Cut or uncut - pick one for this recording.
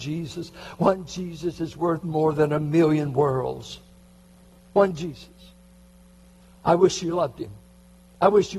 uncut